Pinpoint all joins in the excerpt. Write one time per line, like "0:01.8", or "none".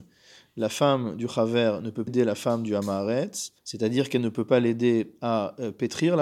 0:02.1
0:03.6